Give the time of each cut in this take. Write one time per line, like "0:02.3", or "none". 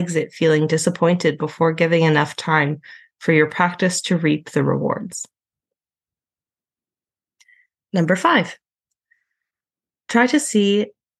none